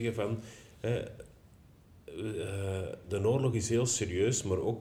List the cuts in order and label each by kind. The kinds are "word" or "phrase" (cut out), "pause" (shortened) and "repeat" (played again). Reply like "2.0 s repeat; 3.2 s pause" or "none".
none